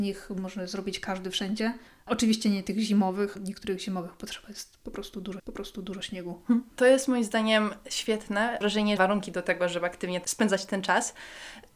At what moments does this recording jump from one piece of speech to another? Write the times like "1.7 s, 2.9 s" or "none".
1.9 s, 3.4 s, 5.4 s, 6.7 s, 8.6 s, 9.0 s